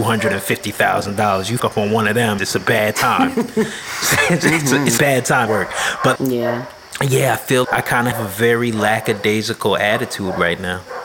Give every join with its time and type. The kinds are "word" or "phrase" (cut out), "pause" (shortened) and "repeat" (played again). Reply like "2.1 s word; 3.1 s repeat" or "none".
1.6 s word; 2.4 s word; 5.0 s word; 5.5 s word; 6.2 s word; 7.6 s word; 8.1 s word